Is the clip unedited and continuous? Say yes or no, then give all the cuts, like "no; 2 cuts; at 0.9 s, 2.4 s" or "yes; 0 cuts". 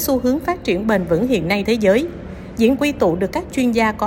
no; 2 cuts; at 1.6 s, 2.8 s